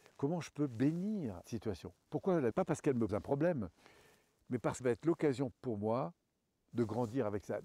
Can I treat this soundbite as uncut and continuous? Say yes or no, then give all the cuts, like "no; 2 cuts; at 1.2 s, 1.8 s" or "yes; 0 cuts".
no; 5 cuts; at 1.4 s, 2.5 s, 3.1 s, 4.8 s, 5.5 s